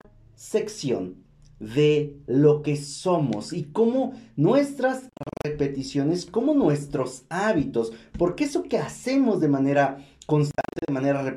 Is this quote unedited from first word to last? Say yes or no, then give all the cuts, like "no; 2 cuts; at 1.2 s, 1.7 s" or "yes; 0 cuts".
yes; 0 cuts